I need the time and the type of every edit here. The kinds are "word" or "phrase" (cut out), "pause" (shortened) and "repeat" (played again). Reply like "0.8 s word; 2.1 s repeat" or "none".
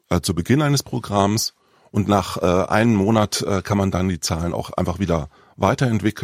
none